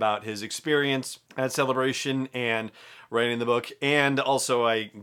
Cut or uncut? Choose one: cut